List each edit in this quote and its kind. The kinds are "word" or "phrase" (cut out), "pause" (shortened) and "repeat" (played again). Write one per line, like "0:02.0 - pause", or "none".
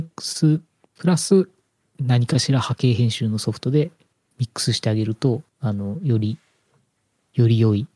0:05.5 - pause

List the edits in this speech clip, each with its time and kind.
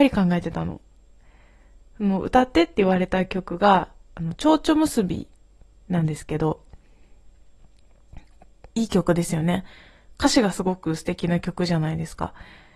0:08.7 - pause

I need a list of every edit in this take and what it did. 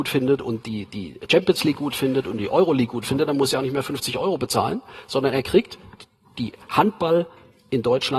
none

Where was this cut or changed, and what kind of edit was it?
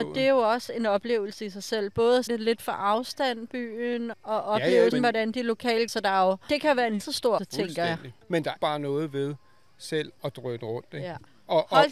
0:02.3 - word
0:04.1 - word
0:04.9 - word
0:05.9 - word
0:07.0 - word
0:07.4 - word
0:08.6 - word
0:10.2 - word

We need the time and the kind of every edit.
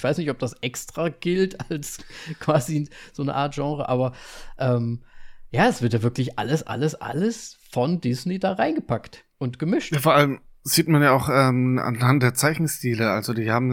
0:09.3 - pause

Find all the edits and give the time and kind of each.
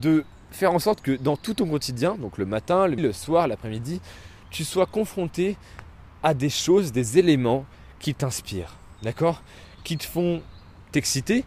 0:03.0 - word

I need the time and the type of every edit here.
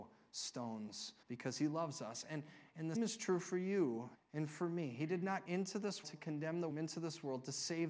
0:01.2 - pause
0:02.9 - word
0:04.1 - pause
0:05.5 - word
0:06.0 - word
0:06.7 - phrase

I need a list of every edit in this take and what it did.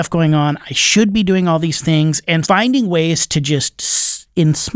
0:02.4 - word

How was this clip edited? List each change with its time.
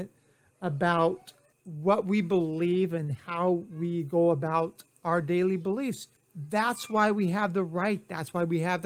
0:01.5 - pause
0:06.2 - pause

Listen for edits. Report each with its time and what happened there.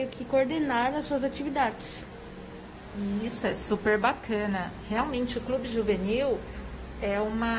none

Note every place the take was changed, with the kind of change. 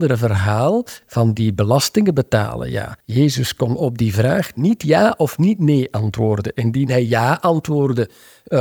0:03.0 - pause

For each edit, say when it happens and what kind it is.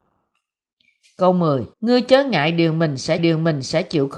0:01.7 - pause
0:03.2 - repeat

